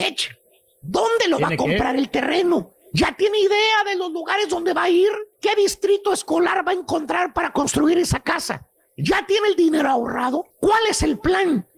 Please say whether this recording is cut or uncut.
cut